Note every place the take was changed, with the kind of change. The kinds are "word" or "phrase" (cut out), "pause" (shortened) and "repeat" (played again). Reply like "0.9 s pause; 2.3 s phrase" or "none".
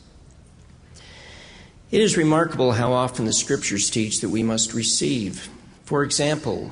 none